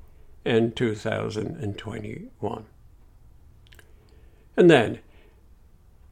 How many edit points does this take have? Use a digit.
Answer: 0